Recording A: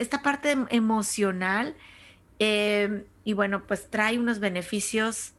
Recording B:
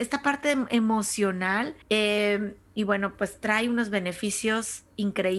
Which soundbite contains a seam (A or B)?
B